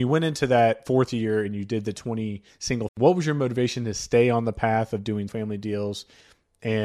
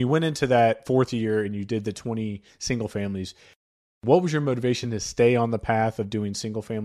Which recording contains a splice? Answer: first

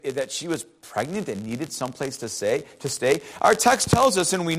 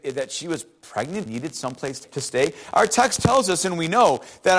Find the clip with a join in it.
second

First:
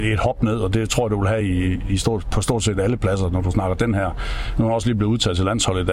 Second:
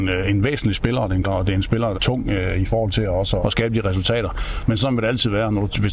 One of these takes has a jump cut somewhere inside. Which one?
second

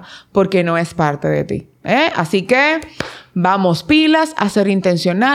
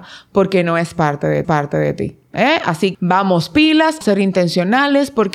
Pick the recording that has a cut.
second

